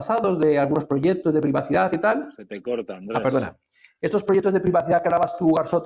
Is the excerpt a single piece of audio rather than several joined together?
yes; 0 cuts

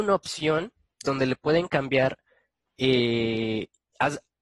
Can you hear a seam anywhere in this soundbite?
no; 0 cuts

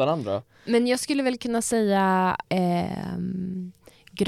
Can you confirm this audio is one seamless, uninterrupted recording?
no; 1 cut; at 2.5 s

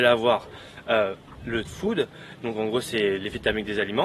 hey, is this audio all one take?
no; 1 cut; at 1.7 s

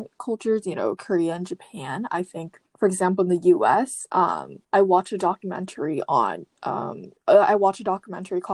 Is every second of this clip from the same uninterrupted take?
no; 3 cuts; at 2.7 s, 4.6 s, 7.2 s

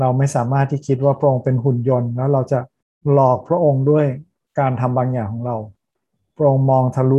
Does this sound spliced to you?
no; 0 cuts

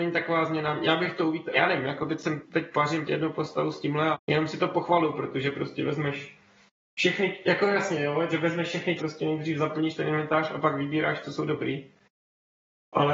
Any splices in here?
yes; 6 cuts; at 1.5 s, 2.4 s, 3.0 s, 4.1 s, 8.3 s, 9.0 s

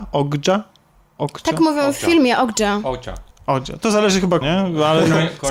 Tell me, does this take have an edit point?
yes; 1 cut; at 4.4 s

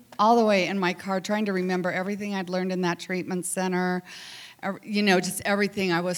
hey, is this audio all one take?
yes; 0 cuts

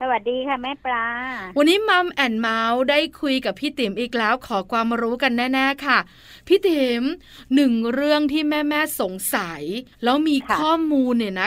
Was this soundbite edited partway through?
yes; 1 cut; at 9.9 s

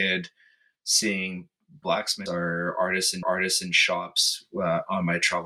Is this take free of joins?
no; 3 cuts; at 1.8 s, 2.3 s, 3.2 s

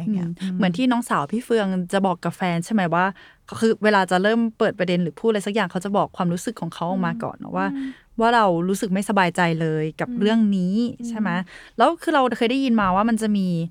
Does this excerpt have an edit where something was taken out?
no; 0 cuts

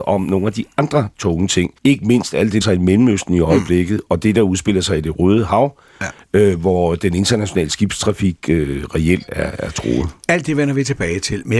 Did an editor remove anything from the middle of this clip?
yes; 3 cuts; at 1.8 s, 2.6 s, 9.3 s

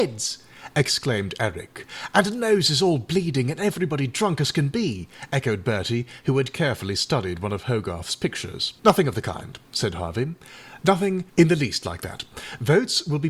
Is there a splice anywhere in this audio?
yes; 3 cuts; at 8.8 s, 9.7 s, 11.3 s

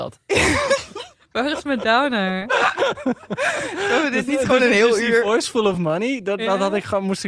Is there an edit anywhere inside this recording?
no; 0 cuts

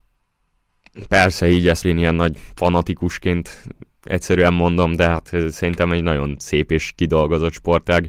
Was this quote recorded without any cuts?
no; 1 cut; at 1.8 s

